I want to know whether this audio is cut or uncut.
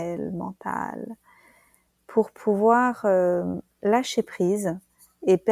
uncut